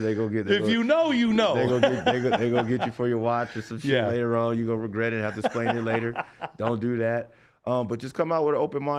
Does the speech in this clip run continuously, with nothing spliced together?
yes; 0 cuts

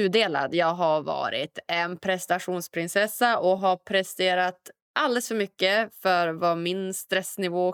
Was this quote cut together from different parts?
no; 0 cuts

